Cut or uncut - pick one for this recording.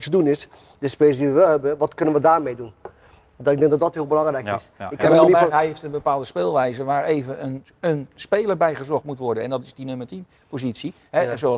uncut